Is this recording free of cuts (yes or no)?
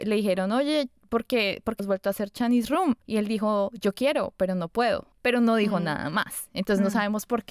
no